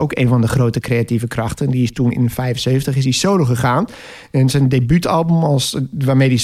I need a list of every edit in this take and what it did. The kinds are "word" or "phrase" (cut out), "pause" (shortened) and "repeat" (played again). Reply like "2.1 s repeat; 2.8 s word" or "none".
none